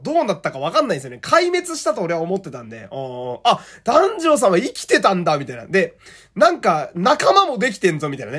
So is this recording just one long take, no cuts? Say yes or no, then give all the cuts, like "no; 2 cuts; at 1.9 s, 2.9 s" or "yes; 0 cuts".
yes; 0 cuts